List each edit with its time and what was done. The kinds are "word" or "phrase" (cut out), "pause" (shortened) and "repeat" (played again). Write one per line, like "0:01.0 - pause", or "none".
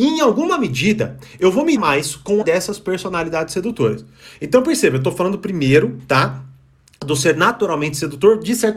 0:01.8 - word
0:02.4 - word